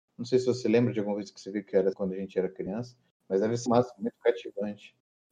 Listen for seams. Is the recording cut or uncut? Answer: cut